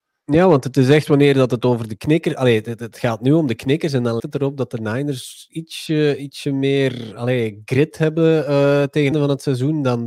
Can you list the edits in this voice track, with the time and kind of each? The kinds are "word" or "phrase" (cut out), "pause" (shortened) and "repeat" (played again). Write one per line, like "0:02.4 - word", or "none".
0:04.2 - word
0:09.1 - phrase